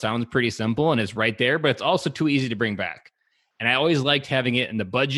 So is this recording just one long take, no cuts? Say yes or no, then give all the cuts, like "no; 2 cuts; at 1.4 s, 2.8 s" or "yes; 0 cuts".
yes; 0 cuts